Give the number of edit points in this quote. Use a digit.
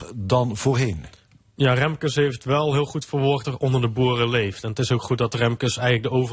1